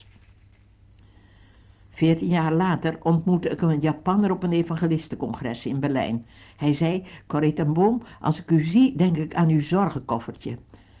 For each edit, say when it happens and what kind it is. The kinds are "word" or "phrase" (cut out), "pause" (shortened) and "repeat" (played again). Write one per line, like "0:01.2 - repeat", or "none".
none